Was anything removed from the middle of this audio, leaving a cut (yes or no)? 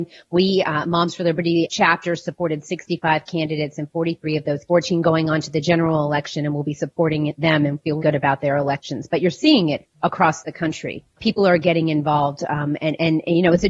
yes